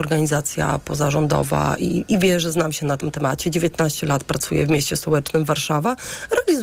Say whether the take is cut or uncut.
uncut